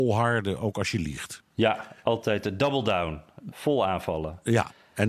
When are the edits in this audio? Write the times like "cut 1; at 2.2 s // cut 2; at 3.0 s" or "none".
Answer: cut 1; at 1.5 s